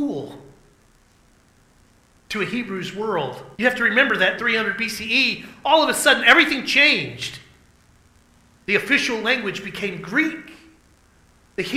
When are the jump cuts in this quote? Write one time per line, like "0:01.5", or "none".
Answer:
0:03.5
0:04.4